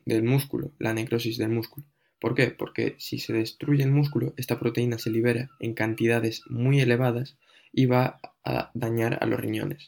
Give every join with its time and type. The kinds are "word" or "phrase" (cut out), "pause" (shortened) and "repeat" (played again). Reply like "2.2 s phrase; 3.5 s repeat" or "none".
none